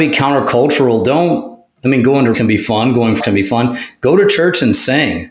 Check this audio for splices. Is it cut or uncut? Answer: cut